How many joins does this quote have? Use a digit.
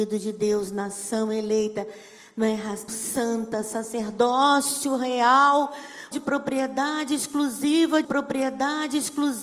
3